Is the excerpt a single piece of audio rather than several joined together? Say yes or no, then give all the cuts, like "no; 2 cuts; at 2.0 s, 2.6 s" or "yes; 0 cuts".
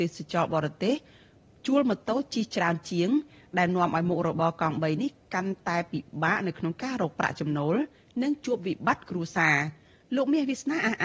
yes; 0 cuts